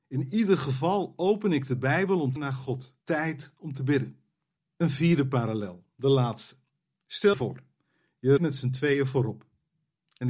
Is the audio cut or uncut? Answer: cut